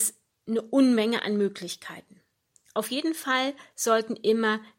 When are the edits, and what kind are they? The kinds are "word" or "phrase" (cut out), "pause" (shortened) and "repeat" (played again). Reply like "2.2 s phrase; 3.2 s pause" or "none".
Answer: none